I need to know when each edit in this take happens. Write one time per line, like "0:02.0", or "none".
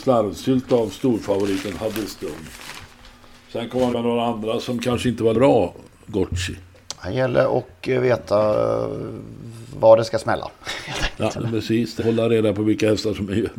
0:03.9
0:05.3
0:11.3
0:12.0